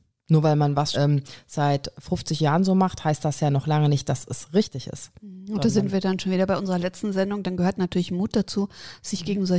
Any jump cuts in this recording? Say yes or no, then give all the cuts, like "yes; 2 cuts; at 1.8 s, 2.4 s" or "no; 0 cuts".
yes; 1 cut; at 0.9 s